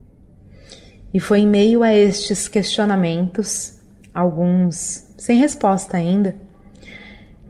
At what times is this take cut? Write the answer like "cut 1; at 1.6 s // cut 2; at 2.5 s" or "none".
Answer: none